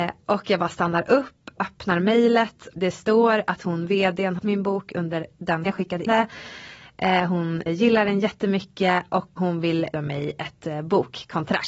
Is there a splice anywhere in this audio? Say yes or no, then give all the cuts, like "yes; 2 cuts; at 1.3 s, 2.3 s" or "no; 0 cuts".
yes; 8 cuts; at 1.6 s, 2.7 s, 4.4 s, 5.7 s, 6.1 s, 7.7 s, 9.4 s, 9.9 s